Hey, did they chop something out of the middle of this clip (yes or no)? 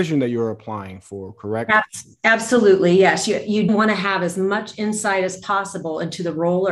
yes